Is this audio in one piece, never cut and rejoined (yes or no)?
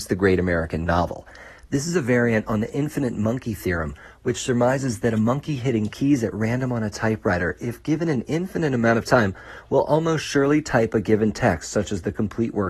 yes